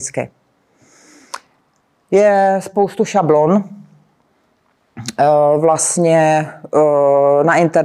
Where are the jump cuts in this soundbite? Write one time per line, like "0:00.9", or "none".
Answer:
none